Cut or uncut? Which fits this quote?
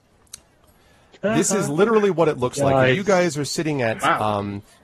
uncut